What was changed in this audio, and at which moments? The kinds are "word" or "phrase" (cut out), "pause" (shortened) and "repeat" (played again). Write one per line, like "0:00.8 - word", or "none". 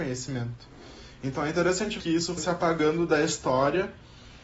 0:02.0 - word
0:02.4 - word